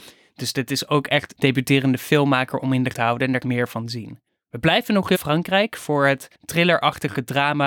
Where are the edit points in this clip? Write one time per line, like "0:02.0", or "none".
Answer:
0:01.3
0:02.9
0:03.4
0:04.3
0:05.1
0:06.3